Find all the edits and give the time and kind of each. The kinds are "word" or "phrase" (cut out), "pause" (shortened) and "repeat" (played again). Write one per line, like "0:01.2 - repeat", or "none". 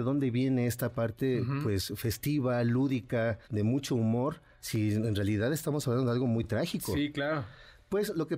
0:03.4 - pause

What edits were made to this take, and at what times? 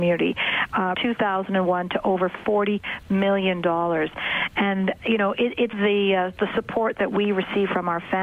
0:00.9 - phrase
0:05.7 - word

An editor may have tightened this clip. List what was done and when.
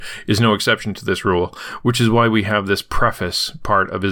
none

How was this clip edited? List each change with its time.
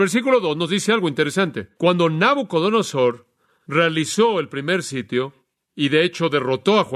0:01.7 - word

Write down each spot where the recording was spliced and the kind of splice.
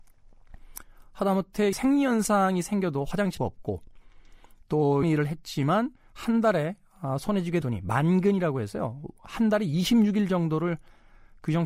0:01.7 - word
0:03.4 - phrase
0:05.0 - word
0:06.0 - pause
0:07.6 - word

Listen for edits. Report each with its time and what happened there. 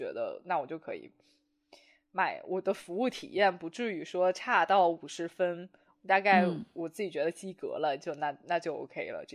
none

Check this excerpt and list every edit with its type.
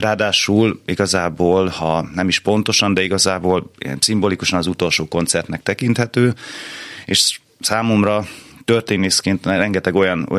none

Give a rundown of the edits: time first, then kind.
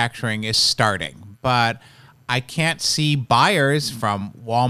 none

